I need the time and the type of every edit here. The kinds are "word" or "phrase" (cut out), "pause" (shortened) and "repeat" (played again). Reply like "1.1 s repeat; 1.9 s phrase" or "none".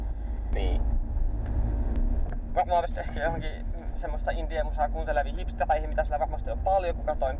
2.8 s word

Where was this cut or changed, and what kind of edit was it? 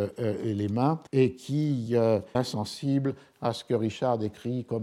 1.1 s pause; 2.3 s word

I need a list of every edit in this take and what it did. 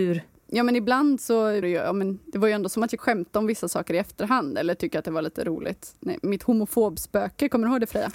1.6 s word; 3.0 s word

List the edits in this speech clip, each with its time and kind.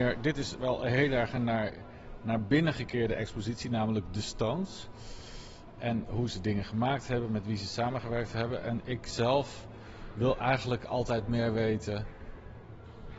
none

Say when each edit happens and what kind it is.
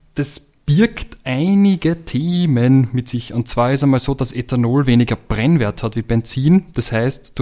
none

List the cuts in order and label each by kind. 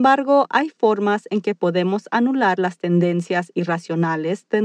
none

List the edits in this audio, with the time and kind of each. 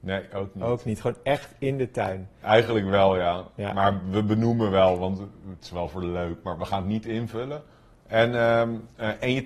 none

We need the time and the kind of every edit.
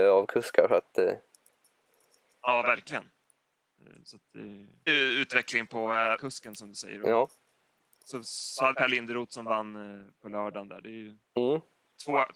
4.9 s word; 6.2 s word; 8.7 s word

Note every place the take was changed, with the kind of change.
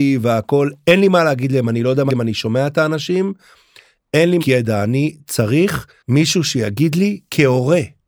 2.1 s word; 4.4 s word; 6.0 s pause

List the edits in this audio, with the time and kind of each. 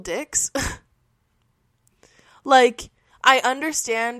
none

